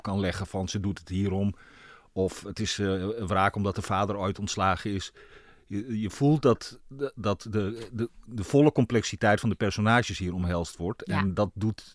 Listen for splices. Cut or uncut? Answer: uncut